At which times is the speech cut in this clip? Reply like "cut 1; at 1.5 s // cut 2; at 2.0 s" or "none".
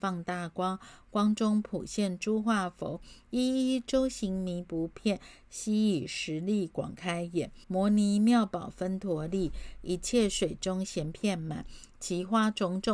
cut 1; at 7.6 s

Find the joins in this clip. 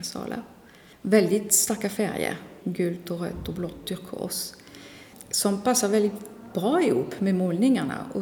cut 1; at 2.6 s

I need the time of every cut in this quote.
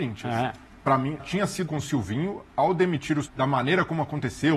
cut 1; at 1.2 s // cut 2; at 1.7 s // cut 3; at 3.2 s

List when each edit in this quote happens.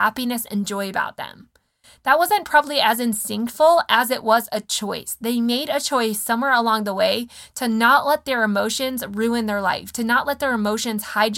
none

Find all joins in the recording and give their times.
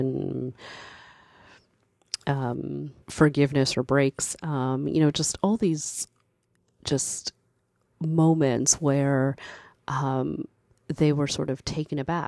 cut 1; at 3.0 s

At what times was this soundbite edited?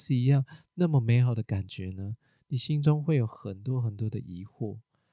none

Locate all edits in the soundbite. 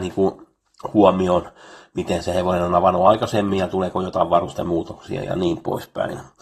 none

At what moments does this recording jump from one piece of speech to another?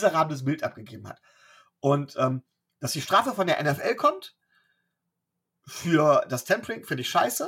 none

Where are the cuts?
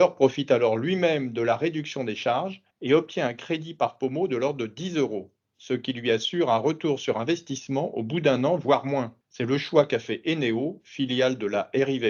cut 1; at 2.7 s // cut 2; at 9.2 s

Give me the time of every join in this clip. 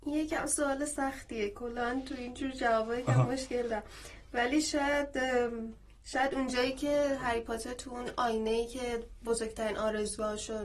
cut 1; at 6.0 s

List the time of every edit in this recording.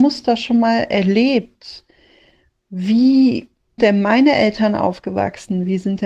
cut 1; at 3.8 s

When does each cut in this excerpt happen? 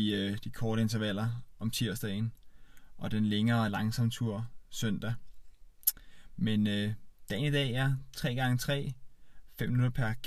none

